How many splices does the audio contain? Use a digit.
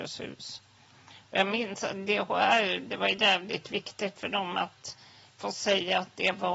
0